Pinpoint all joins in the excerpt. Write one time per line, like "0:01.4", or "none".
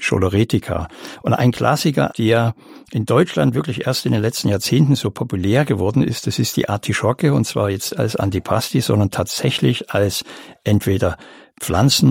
0:02.1
0:07.9